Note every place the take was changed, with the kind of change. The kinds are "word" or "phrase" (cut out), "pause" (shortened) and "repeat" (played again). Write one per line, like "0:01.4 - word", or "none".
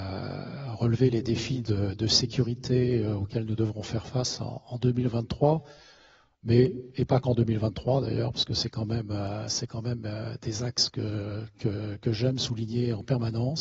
none